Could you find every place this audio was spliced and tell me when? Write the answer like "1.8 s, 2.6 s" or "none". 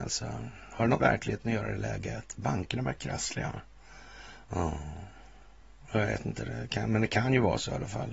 1.0 s, 1.8 s, 3.0 s